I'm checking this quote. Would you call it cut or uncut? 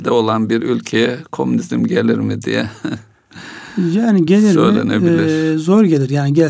uncut